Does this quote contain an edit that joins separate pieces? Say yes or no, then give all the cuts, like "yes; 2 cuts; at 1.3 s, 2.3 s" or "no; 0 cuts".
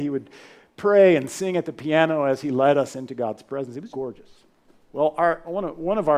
yes; 2 cuts; at 3.9 s, 4.6 s